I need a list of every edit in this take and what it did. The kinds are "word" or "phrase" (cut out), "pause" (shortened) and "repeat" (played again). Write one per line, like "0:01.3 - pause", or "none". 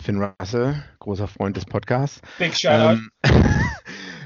0:00.9 - pause
0:03.1 - pause